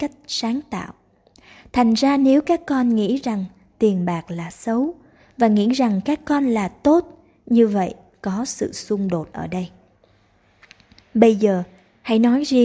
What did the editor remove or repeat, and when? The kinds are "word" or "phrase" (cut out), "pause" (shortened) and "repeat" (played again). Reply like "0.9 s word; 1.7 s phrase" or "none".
none